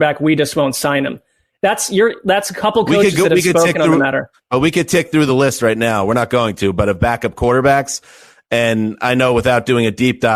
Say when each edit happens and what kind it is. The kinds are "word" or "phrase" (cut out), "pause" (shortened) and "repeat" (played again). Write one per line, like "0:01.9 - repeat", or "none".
none